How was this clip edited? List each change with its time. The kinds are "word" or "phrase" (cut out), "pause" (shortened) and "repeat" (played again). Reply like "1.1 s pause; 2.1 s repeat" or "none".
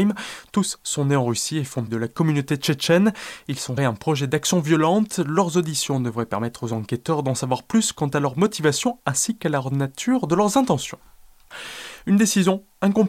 1.9 s word; 3.8 s phrase

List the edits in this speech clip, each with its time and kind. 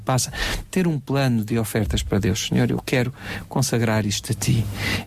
none

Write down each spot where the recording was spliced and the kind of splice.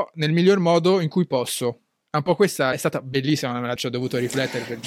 2.7 s word; 3.8 s word

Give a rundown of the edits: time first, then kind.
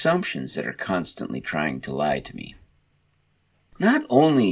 none

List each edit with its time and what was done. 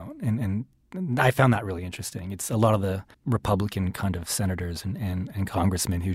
3.1 s pause

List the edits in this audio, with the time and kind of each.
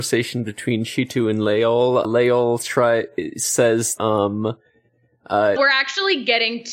2.0 s word; 4.0 s word; 5.6 s word

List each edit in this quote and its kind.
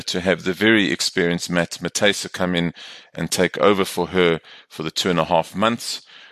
none

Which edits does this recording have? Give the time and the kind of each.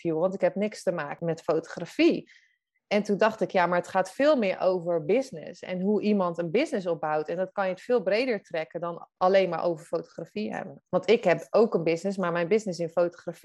10.9 s pause

